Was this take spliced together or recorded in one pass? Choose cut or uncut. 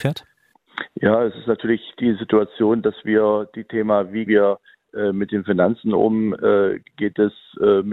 cut